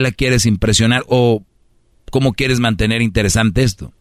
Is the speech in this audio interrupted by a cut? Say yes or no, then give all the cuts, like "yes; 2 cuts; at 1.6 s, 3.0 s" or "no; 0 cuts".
no; 0 cuts